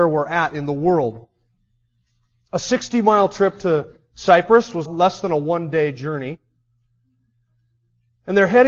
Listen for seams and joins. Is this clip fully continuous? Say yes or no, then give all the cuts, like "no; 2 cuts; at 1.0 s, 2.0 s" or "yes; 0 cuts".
no; 1 cut; at 4.9 s